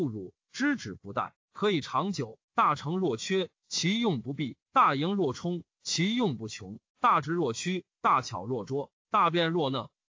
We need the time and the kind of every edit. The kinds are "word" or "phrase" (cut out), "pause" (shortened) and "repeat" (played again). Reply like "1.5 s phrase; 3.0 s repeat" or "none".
2.4 s pause; 4.6 s pause; 6.9 s pause